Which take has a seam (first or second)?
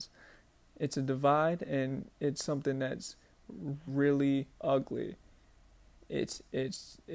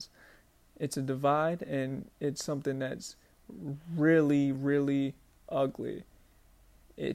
first